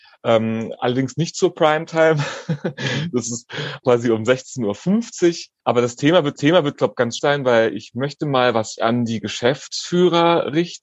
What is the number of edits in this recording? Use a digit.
5